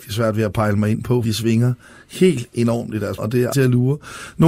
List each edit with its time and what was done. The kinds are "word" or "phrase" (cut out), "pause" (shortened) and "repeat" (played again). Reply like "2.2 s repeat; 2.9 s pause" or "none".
1.2 s word; 3.2 s word; 3.5 s word